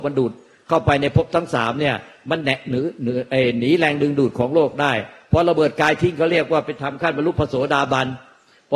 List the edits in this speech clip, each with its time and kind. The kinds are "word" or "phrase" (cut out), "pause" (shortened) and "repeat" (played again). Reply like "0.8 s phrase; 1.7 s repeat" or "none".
none